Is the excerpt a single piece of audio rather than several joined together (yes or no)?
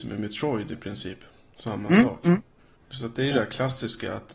yes